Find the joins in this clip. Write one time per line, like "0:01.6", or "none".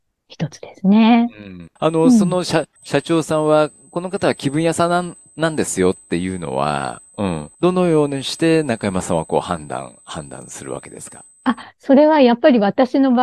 0:01.8
0:02.8
0:07.5
0:11.3